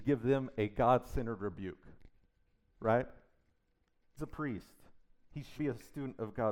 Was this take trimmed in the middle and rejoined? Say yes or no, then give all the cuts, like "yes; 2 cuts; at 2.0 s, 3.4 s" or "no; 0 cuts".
yes; 2 cuts; at 4.2 s, 5.6 s